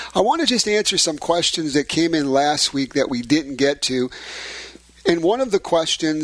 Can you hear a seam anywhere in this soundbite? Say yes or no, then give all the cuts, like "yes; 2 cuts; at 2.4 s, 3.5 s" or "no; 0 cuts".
no; 0 cuts